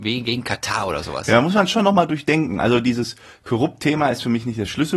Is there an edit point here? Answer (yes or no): no